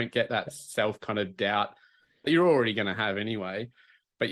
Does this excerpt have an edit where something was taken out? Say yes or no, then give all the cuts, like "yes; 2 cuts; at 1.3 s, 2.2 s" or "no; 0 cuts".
no; 0 cuts